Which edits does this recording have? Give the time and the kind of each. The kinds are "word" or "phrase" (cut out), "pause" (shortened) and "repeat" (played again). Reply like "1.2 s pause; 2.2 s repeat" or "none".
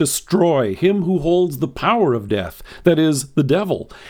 none